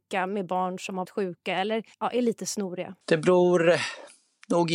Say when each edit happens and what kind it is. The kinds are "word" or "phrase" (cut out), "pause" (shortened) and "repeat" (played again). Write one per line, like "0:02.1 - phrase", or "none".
0:01.0 - word
0:01.9 - pause
0:03.0 - pause

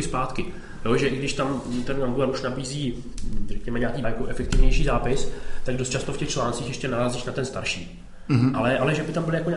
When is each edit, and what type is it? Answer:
0:04.0 - phrase

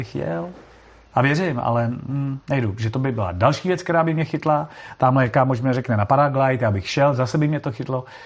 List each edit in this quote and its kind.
0:02.4 - pause

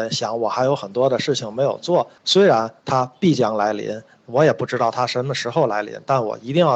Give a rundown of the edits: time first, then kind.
0:02.2 - pause

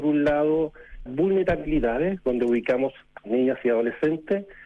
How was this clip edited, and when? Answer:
0:01.1 - word
0:03.2 - word

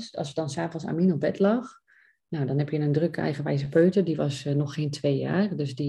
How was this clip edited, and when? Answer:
none

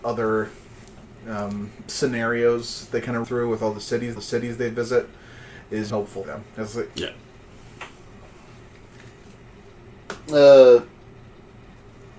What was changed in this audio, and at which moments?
0:03.2 - word
0:04.2 - repeat
0:05.9 - phrase
0:06.2 - word
0:06.9 - phrase

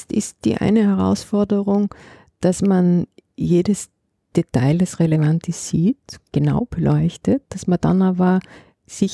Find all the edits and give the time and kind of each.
none

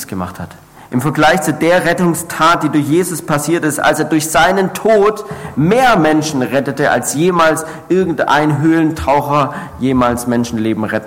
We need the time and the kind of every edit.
none

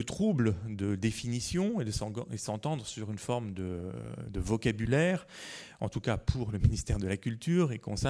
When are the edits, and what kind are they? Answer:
none

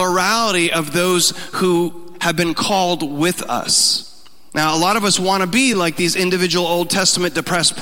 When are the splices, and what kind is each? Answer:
none

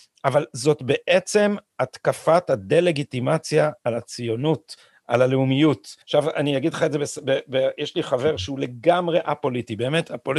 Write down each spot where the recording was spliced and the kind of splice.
0:06.0 - pause

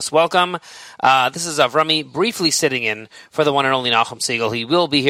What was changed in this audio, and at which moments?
none

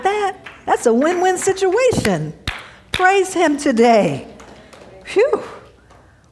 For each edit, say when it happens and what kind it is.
none

